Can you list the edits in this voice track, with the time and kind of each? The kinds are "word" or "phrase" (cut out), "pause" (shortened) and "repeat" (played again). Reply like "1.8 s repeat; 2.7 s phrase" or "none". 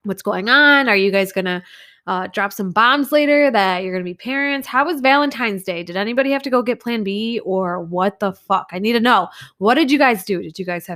none